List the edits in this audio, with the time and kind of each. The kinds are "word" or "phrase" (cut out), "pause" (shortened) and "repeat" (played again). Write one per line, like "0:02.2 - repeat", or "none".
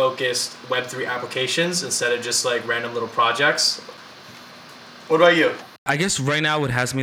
none